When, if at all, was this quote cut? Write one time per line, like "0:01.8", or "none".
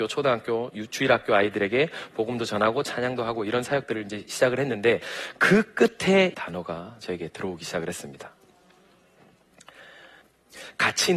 0:06.3